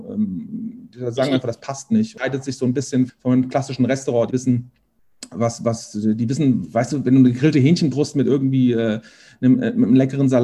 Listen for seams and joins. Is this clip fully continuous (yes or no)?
no